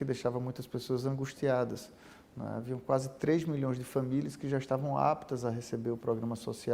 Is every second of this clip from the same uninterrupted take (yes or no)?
yes